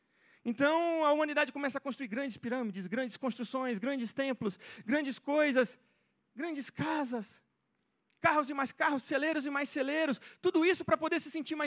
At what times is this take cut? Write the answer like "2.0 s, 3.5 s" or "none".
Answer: none